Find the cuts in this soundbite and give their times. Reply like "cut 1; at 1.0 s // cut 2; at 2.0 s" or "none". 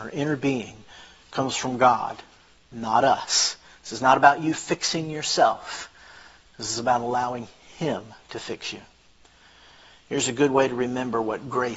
none